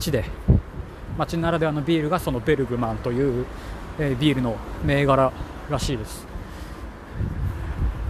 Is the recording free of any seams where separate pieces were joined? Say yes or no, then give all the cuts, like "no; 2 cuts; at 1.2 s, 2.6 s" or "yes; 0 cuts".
yes; 0 cuts